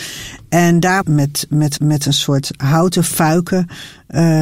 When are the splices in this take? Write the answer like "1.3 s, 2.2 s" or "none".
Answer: 1.0 s, 1.8 s